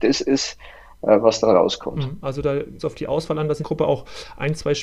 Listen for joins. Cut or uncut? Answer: cut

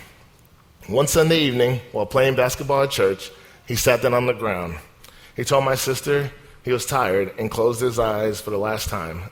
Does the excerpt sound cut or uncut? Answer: uncut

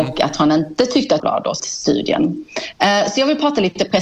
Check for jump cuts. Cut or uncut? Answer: cut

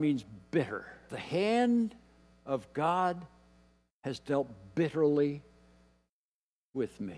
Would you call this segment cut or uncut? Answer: cut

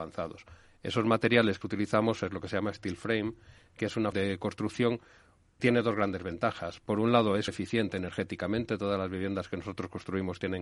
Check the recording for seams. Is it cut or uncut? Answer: cut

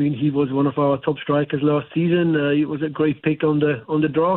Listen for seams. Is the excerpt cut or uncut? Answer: uncut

